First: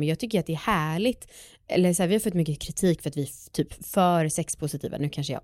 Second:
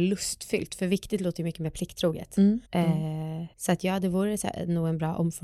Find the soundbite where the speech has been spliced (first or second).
second